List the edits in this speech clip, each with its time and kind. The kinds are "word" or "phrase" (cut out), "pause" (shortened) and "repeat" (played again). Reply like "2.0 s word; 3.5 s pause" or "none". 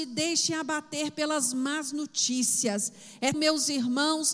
3.3 s word